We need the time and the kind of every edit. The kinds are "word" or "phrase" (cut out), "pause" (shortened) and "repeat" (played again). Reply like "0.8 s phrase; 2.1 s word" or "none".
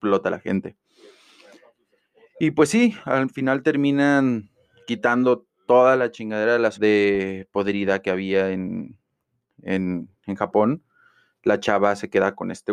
6.7 s word

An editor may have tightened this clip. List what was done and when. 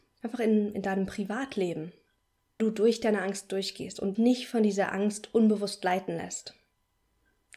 2.6 s word; 4.1 s word

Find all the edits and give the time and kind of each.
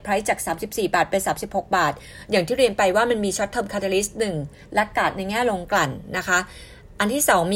none

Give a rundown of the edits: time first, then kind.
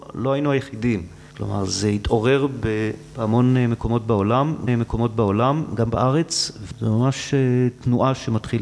1.3 s pause; 4.7 s repeat

